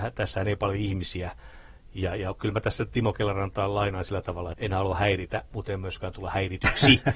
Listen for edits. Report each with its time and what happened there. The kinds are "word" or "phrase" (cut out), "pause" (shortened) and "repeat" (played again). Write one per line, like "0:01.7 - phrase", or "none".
0:04.5 - word